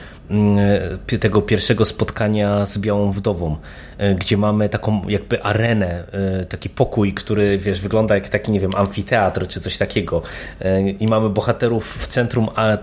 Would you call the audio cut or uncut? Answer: uncut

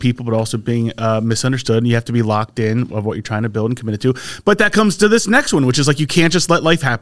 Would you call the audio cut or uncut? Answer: uncut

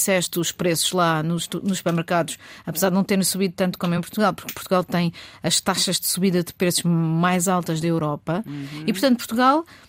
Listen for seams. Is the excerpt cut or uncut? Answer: uncut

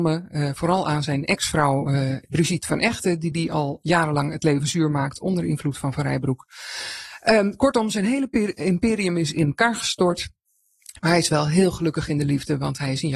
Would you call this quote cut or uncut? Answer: uncut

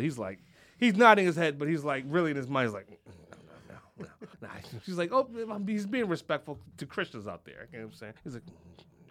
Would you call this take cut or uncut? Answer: cut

